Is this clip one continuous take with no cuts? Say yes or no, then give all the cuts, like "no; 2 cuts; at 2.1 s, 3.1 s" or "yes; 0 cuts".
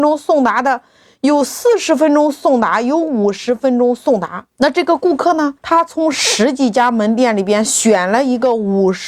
no; 2 cuts; at 4.5 s, 5.6 s